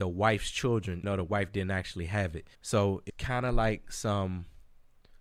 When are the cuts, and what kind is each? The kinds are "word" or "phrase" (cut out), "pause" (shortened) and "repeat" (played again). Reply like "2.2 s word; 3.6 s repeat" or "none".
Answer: 1.0 s word; 2.5 s pause; 3.1 s word